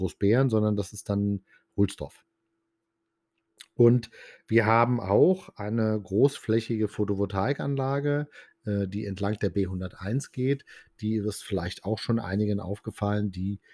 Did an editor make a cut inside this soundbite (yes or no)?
no